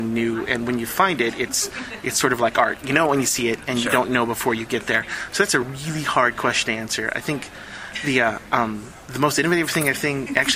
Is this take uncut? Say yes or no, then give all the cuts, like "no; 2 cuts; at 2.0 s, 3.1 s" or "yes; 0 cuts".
yes; 0 cuts